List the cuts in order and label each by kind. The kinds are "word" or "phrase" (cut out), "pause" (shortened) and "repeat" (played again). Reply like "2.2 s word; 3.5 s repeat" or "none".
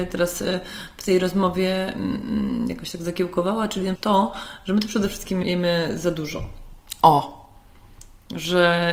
4.0 s word; 5.4 s word